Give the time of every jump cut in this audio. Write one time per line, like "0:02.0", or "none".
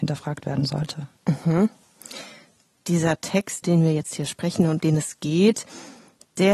0:01.2
0:03.6
0:04.8